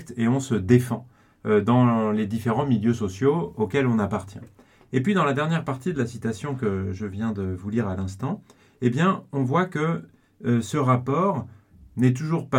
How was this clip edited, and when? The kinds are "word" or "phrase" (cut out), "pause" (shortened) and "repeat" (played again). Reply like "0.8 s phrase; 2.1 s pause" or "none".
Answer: none